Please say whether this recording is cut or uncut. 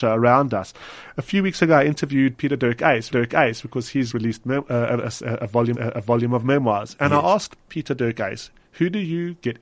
cut